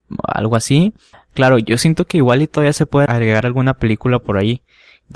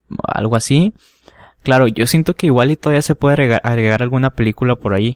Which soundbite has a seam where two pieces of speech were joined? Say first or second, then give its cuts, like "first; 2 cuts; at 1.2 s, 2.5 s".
first; 2 cuts; at 1.1 s, 3.1 s